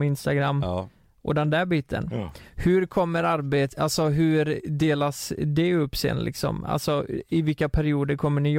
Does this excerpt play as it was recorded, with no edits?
yes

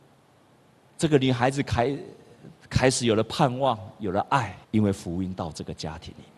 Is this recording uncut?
no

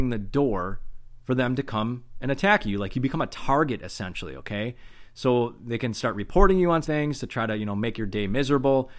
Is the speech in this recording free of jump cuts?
no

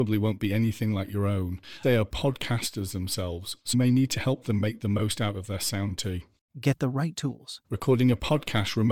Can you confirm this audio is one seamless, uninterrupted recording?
no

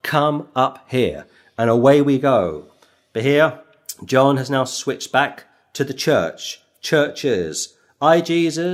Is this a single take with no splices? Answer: yes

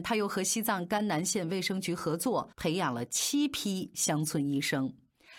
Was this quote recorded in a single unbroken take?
no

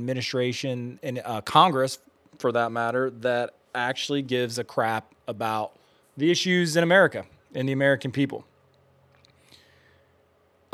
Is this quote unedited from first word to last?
yes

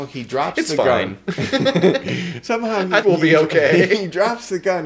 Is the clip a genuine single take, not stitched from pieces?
no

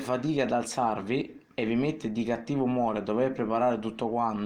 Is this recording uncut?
yes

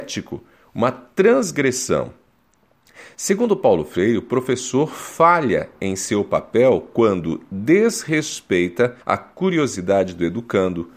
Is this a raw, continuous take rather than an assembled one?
no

